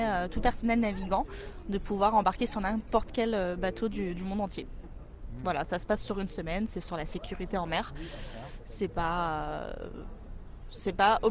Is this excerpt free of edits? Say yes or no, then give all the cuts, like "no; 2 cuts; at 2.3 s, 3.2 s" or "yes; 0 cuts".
yes; 0 cuts